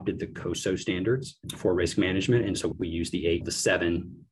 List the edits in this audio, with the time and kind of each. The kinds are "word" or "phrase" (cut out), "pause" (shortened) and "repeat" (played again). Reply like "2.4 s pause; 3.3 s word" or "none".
none